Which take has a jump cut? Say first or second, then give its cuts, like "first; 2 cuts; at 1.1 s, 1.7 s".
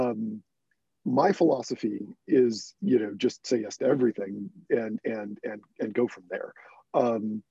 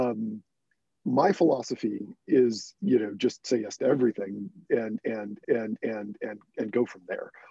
second; 1 cut; at 5.4 s